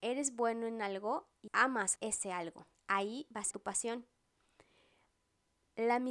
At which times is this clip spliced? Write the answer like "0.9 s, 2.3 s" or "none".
1.5 s, 2.0 s, 2.7 s, 3.5 s